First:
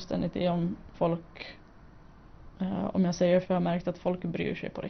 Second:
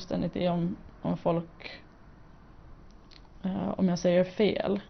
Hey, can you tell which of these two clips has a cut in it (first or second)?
first